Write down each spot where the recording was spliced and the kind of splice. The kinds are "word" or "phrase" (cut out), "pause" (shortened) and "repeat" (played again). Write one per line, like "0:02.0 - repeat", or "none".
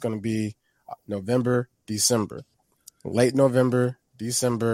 none